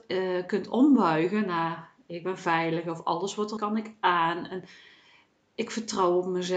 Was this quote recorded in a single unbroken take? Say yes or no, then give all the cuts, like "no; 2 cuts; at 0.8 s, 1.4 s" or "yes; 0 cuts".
no; 1 cut; at 3.6 s